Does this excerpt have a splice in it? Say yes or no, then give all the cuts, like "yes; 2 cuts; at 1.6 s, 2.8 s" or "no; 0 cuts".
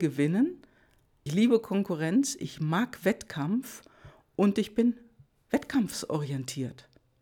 yes; 1 cut; at 1.3 s